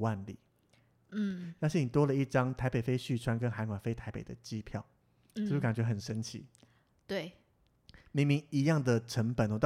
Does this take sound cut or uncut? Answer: uncut